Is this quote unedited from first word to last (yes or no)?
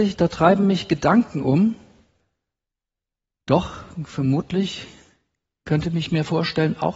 yes